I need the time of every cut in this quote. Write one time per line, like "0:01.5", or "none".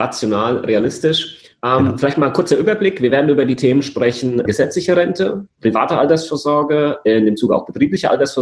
0:04.5